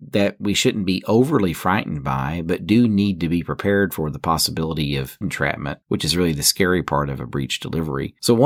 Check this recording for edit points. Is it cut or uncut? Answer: cut